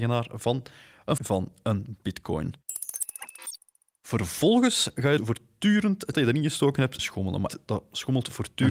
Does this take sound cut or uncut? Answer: cut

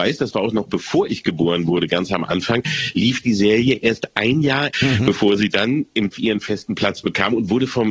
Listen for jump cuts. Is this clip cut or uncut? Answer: cut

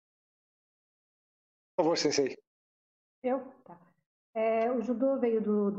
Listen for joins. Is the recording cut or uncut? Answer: uncut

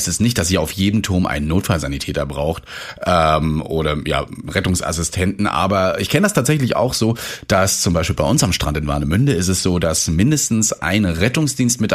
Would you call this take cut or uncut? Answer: uncut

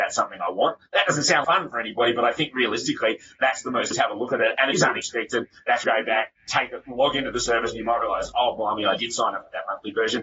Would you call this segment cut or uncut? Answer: cut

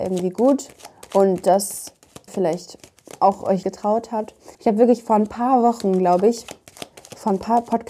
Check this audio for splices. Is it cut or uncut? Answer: cut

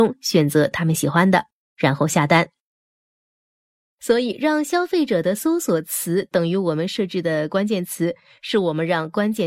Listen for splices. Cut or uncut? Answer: uncut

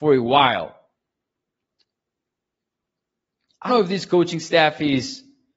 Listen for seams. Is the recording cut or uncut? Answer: cut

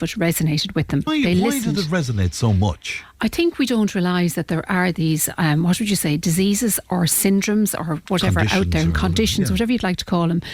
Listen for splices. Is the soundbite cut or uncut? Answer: cut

